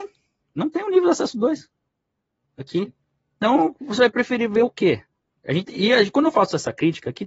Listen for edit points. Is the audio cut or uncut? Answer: cut